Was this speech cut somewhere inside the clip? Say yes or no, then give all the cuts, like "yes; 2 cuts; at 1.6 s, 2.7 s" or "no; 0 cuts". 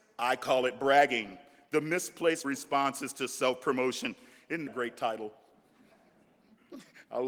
yes; 2 cuts; at 2.4 s, 4.7 s